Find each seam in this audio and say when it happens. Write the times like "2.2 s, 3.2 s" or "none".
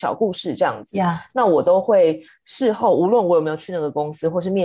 none